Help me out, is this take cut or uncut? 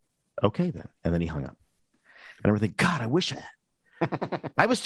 cut